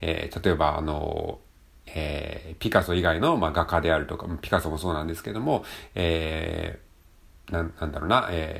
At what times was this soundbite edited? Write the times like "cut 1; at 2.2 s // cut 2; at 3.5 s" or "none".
none